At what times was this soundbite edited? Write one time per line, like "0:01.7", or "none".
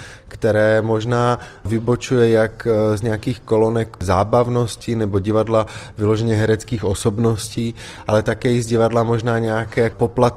none